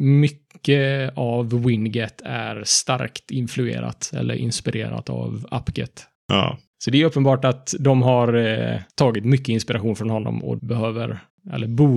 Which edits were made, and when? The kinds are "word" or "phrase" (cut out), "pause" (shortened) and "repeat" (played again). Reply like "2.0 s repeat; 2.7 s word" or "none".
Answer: 8.9 s pause; 10.6 s phrase